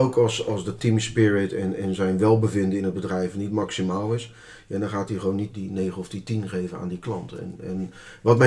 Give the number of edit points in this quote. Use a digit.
1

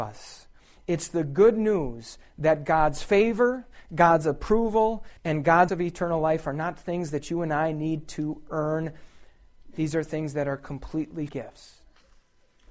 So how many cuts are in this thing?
3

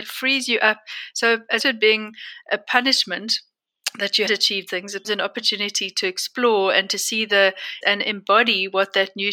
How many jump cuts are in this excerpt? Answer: 5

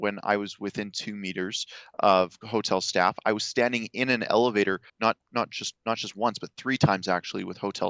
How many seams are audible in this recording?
2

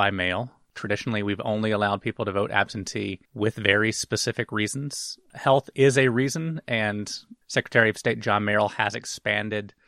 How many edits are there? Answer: 2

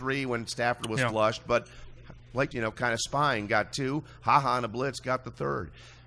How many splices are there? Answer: 1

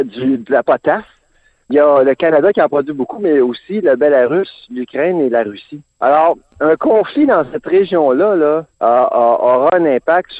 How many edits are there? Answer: 3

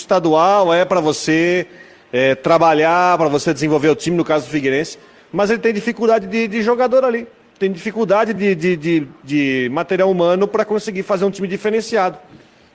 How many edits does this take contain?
0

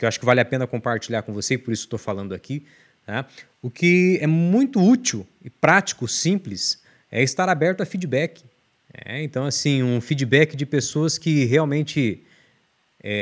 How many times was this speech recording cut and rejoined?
0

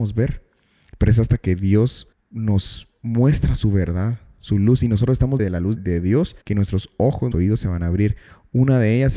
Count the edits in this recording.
5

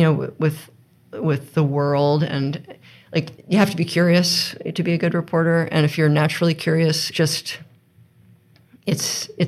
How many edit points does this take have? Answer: 2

